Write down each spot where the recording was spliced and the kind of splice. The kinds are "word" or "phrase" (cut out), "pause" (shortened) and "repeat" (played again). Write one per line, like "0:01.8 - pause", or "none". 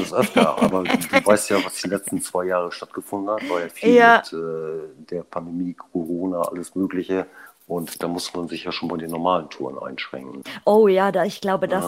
none